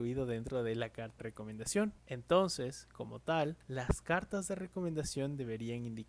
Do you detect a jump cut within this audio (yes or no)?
yes